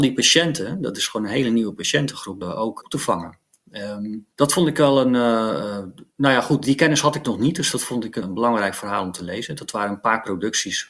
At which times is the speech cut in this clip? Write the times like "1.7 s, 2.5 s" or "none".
2.4 s, 2.8 s, 4.3 s, 8.2 s